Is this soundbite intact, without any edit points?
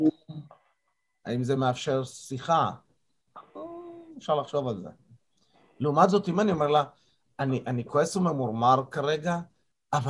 yes; 0 cuts

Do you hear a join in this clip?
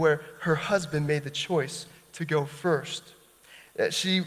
no; 0 cuts

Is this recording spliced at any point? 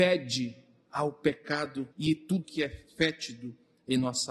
yes; 2 cuts; at 1.9 s, 2.4 s

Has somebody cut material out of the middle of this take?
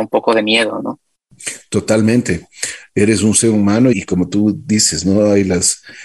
yes; 1 cut; at 3.9 s

